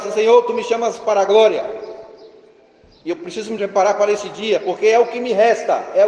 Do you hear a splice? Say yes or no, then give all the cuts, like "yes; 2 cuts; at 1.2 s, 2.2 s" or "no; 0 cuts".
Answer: no; 0 cuts